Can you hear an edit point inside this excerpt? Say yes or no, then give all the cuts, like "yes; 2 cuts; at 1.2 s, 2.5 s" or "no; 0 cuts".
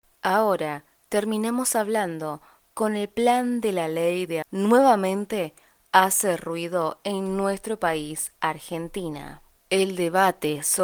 yes; 1 cut; at 4.4 s